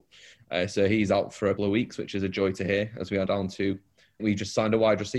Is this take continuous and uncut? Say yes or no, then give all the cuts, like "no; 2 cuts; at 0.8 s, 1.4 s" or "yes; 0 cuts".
no; 3 cuts; at 1.6 s, 3.2 s, 4.2 s